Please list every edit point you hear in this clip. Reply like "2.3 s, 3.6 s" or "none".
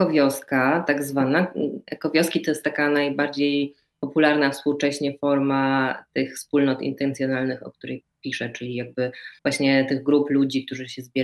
9.4 s